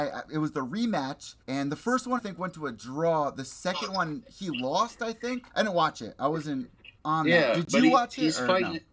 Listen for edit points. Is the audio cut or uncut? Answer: cut